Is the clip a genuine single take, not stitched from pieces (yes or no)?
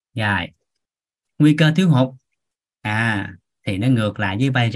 yes